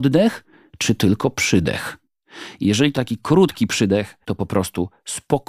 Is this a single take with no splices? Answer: no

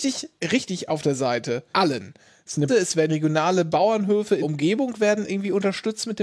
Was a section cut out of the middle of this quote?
yes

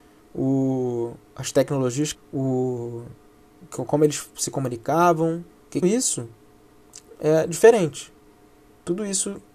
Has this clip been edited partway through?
yes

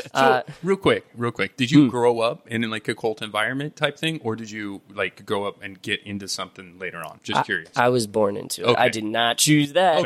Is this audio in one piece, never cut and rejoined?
yes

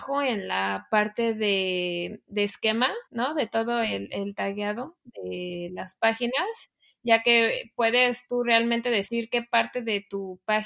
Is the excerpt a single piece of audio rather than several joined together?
no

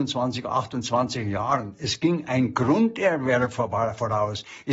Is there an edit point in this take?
no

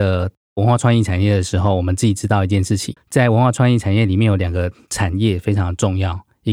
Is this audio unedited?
no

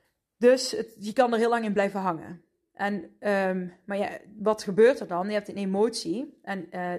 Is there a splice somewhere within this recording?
no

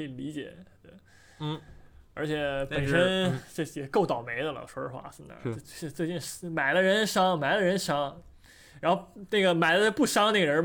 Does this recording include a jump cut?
no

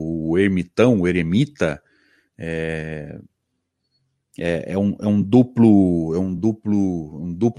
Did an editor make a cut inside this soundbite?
no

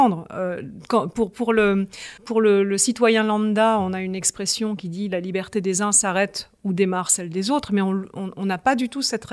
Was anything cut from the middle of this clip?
yes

